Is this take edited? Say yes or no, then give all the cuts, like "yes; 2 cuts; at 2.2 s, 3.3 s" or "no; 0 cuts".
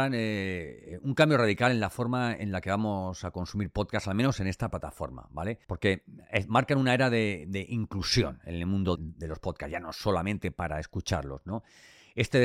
yes; 2 cuts; at 5.6 s, 9.0 s